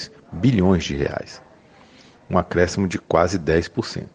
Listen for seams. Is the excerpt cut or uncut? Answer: uncut